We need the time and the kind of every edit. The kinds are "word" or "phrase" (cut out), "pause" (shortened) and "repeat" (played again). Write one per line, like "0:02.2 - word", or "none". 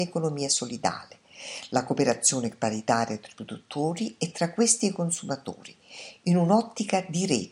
none